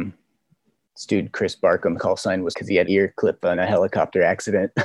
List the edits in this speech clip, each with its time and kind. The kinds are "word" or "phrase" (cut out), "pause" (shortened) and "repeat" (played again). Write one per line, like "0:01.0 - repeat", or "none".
0:02.0 - word
0:02.5 - word
0:02.8 - word
0:03.4 - word